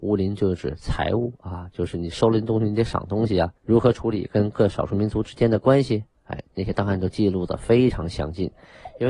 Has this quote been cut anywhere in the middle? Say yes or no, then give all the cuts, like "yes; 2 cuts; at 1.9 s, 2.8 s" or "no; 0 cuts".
yes; 1 cut; at 3.6 s